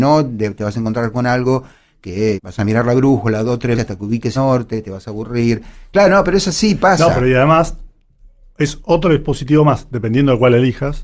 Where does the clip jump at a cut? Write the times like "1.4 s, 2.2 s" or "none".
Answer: 2.4 s, 3.7 s, 4.3 s